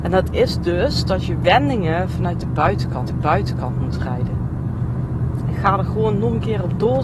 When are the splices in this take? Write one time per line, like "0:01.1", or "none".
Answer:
0:03.1